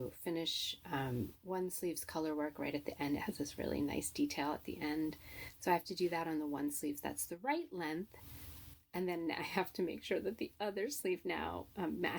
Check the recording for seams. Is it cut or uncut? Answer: uncut